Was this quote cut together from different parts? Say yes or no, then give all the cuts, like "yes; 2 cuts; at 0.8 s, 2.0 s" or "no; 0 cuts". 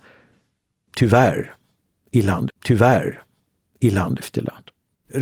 yes; 1 cut; at 2.5 s